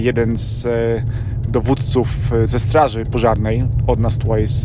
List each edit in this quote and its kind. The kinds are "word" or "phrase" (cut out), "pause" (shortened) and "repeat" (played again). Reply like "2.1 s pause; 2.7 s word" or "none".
2.5 s word